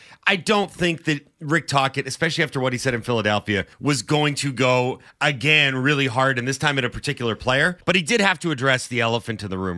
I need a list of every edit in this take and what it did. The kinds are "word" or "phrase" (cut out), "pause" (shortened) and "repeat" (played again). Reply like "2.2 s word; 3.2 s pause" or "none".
3.7 s pause; 7.8 s pause